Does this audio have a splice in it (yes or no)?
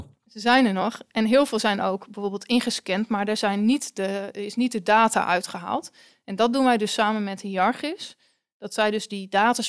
no